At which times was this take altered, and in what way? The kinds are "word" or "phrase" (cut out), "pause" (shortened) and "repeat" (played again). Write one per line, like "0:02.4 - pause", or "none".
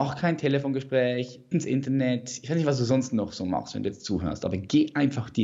0:01.5 - phrase